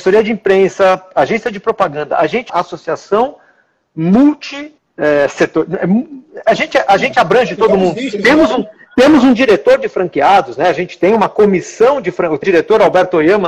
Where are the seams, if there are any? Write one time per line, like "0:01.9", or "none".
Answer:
0:02.5
0:04.8
0:12.4